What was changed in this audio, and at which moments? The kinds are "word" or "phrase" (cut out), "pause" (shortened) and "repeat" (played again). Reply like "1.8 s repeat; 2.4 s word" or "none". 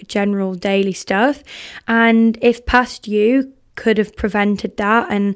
none